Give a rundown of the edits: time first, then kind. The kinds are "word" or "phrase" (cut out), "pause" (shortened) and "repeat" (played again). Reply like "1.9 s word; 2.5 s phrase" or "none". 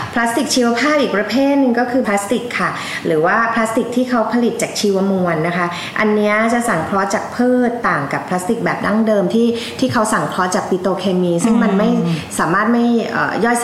2.0 s word